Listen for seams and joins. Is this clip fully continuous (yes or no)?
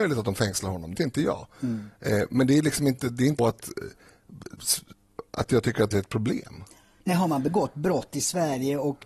no